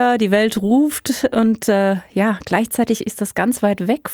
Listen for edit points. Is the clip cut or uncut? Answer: uncut